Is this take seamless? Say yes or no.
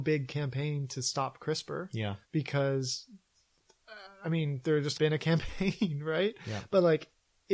no